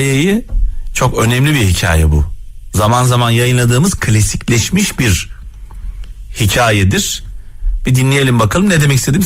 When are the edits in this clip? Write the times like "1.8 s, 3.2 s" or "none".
none